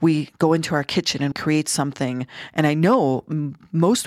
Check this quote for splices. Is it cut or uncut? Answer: cut